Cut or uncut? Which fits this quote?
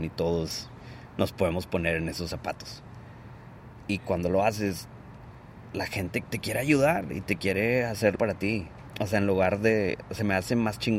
cut